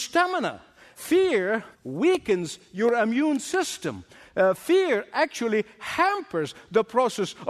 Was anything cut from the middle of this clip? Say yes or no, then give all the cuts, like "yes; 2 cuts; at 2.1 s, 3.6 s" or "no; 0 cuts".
yes; 1 cut; at 1.7 s